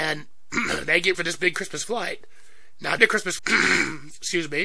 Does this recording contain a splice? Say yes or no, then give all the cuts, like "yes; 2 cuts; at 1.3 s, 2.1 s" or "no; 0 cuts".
yes; 3 cuts; at 1.1 s, 3.0 s, 3.4 s